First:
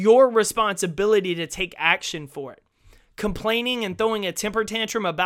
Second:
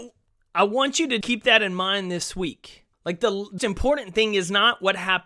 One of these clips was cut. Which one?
second; 3 cuts; at 1.2 s, 2.9 s, 3.6 s

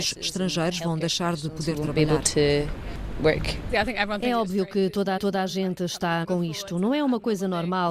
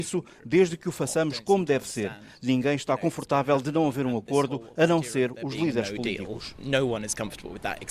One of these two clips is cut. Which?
first; 2 cuts; at 5.2 s, 6.2 s

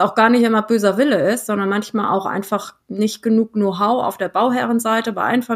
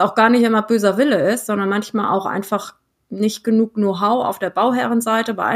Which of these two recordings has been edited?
first; 1 cut; at 2.8 s

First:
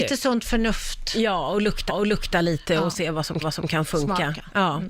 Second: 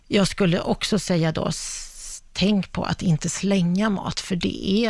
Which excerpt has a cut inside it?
first; 2 cuts; at 1.9 s, 3.4 s

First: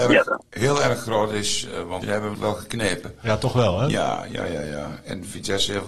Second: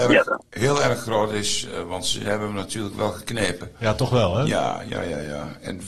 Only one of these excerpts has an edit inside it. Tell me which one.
first; 2 cuts; at 2.0 s, 2.3 s

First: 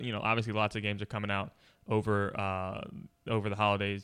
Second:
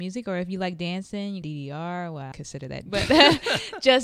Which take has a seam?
second; 3 cuts; at 1.4 s, 2.3 s, 2.9 s

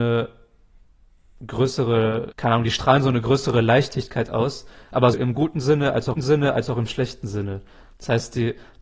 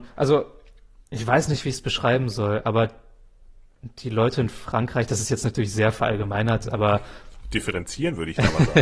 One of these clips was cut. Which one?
first; 3 cuts; at 2.3 s, 5.1 s, 6.1 s

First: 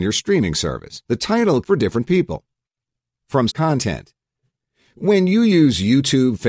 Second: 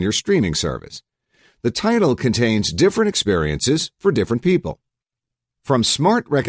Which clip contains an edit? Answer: first; 3 cuts; at 1.0 s, 1.6 s, 3.5 s

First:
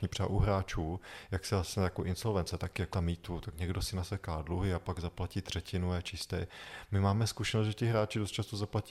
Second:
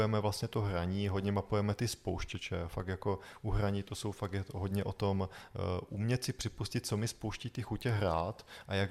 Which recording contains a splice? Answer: first; 1 cut; at 2.9 s

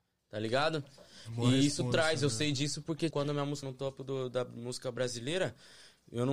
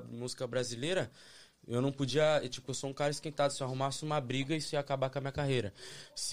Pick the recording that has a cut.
first; 2 cuts; at 3.1 s, 3.6 s

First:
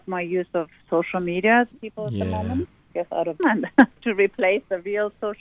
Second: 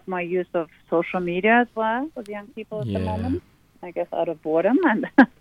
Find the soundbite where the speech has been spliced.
first; 3 cuts; at 1.7 s, 2.9 s, 3.4 s

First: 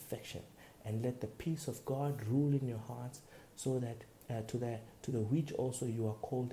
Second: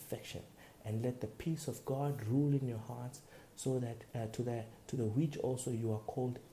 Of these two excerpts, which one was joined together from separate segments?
second; 1 cut; at 4.1 s

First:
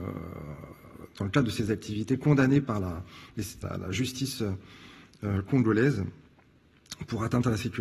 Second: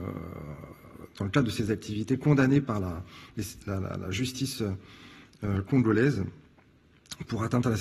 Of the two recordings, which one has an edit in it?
first; 1 cut; at 3.6 s

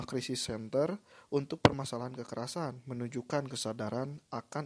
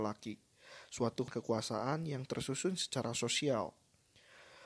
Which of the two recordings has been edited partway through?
second; 1 cut; at 1.3 s

